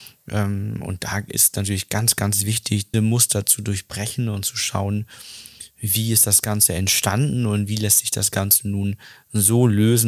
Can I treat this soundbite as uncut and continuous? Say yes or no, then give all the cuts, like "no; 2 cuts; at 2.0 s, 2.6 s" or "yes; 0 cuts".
no; 1 cut; at 2.9 s